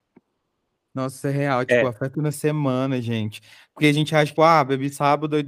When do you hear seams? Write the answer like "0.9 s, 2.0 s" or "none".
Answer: 2.1 s, 4.4 s